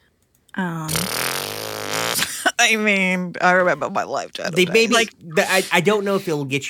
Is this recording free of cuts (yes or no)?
yes